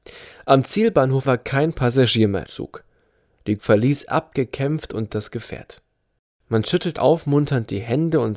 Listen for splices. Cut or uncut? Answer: cut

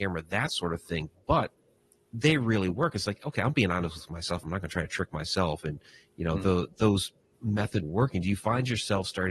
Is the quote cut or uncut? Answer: cut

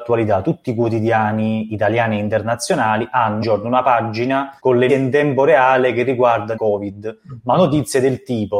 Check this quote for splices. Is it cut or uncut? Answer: cut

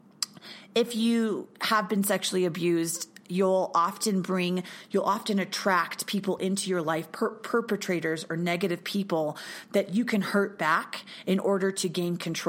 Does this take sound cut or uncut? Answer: uncut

